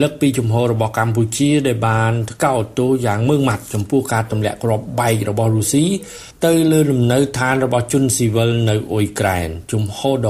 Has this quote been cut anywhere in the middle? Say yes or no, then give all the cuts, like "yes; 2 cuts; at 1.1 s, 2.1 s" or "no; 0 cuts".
no; 0 cuts